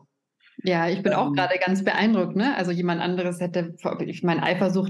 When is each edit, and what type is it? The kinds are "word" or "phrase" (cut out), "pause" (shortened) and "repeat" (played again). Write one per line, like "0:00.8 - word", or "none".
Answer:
none